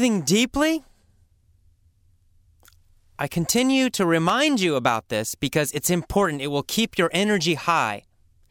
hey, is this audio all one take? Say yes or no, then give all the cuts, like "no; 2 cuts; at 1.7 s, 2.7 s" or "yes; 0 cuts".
yes; 0 cuts